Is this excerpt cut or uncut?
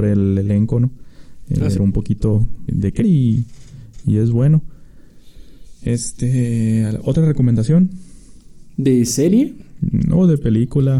cut